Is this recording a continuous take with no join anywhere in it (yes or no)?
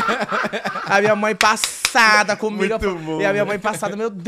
yes